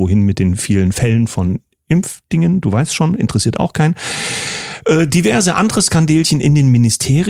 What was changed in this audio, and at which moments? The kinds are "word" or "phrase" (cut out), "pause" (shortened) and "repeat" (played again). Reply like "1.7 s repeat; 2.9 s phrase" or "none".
none